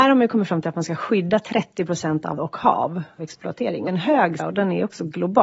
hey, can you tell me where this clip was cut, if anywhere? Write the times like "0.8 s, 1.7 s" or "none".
2.4 s, 3.2 s, 3.9 s, 4.4 s